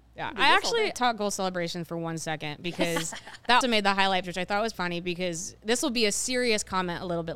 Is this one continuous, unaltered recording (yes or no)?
no